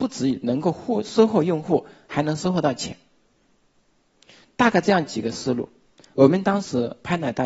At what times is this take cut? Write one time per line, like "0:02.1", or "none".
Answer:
none